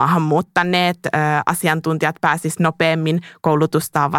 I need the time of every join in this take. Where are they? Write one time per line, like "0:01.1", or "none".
none